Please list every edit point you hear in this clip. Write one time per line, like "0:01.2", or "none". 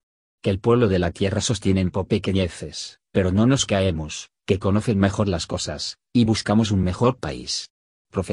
none